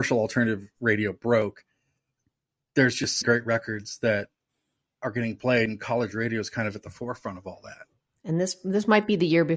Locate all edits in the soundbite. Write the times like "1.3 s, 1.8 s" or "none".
3.2 s